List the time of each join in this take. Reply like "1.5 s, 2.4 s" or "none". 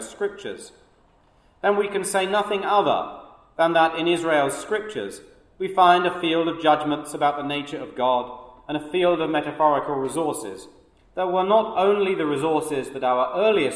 none